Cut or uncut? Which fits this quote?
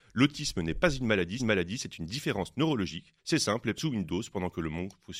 cut